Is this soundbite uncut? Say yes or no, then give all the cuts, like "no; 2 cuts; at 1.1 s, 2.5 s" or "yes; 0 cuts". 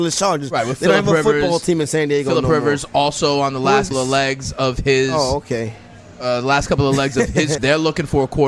no; 2 cuts; at 3.9 s, 7.6 s